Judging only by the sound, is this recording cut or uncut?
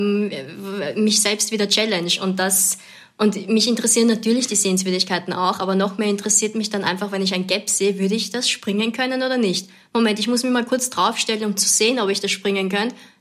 uncut